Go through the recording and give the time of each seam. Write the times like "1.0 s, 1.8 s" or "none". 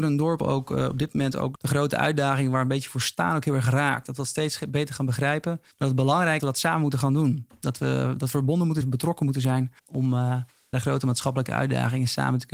1.5 s, 5.7 s, 6.4 s, 8.8 s, 9.8 s, 10.7 s